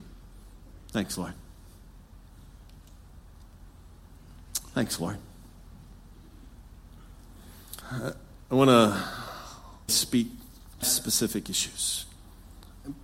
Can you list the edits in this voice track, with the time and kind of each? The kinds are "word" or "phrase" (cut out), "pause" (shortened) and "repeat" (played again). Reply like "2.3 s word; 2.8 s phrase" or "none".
7.8 s pause; 9.9 s word; 10.8 s word